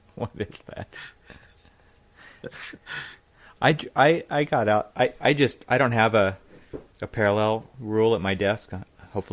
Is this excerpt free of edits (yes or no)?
yes